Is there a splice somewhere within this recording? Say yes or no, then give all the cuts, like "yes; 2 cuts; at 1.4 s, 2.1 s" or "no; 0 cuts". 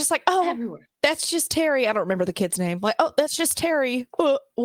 no; 0 cuts